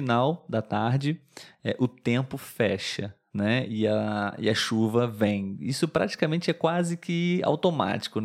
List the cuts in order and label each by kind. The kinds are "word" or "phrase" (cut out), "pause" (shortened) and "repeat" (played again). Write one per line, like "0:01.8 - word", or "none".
none